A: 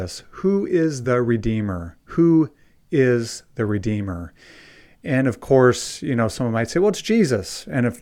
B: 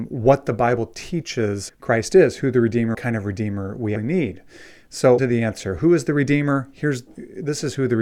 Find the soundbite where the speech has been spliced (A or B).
B